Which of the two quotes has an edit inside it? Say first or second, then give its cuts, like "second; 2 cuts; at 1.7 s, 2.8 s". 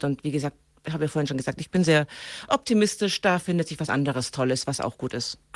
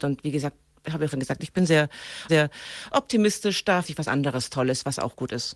second; 3 cuts; at 1.1 s, 2.3 s, 3.8 s